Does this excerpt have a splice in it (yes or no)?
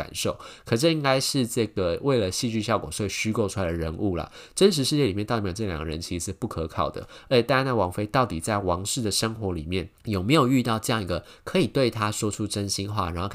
yes